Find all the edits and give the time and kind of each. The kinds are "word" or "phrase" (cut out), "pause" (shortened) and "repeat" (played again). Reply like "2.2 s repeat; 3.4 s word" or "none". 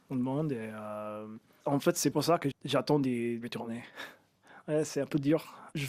2.1 s word; 2.5 s word